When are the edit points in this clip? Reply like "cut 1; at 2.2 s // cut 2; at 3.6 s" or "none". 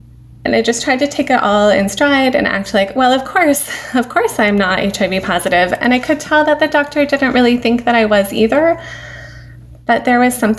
none